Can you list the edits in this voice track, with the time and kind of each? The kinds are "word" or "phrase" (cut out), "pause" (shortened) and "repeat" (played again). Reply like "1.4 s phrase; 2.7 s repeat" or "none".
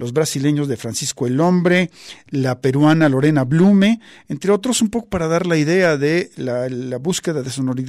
none